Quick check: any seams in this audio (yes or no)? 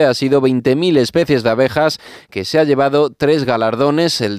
no